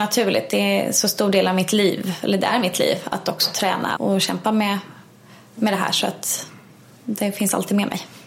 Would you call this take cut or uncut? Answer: cut